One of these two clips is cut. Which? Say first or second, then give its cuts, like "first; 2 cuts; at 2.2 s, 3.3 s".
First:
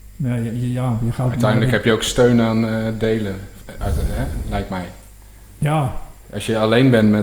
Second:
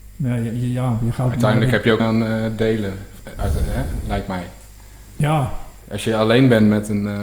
second; 1 cut; at 2.0 s